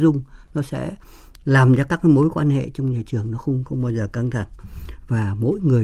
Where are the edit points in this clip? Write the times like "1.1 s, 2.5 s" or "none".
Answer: 3.6 s